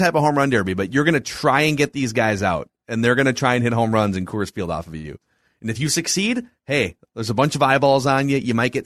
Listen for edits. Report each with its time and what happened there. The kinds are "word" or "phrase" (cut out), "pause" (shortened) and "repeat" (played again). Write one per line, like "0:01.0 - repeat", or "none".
none